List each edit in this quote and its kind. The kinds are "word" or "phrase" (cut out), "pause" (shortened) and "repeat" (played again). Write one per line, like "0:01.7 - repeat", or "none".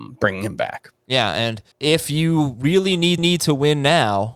0:01.0 - pause
0:01.7 - pause
0:03.2 - repeat